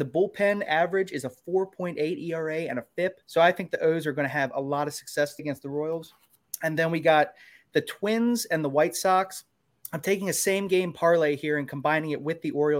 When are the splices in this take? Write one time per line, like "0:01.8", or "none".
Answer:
0:03.2
0:05.4